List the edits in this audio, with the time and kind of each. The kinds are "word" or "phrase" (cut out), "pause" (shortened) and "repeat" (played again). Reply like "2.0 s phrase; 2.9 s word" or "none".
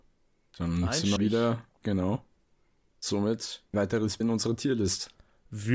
1.2 s word; 1.8 s word; 3.7 s word; 4.2 s word